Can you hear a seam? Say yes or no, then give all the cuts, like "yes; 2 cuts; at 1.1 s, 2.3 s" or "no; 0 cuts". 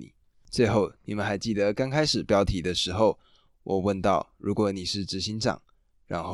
no; 0 cuts